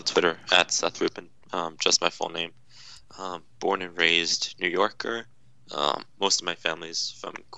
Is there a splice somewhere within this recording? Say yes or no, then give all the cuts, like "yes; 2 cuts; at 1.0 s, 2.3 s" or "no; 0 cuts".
no; 0 cuts